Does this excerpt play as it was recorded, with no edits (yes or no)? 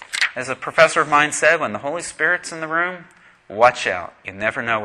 yes